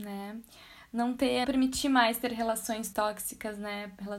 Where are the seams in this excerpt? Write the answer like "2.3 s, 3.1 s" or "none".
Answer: 1.4 s, 2.9 s